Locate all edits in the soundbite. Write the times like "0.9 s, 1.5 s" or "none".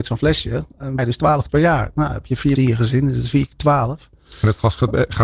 1.0 s, 1.5 s, 2.6 s